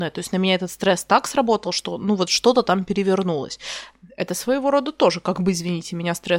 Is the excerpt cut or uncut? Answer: uncut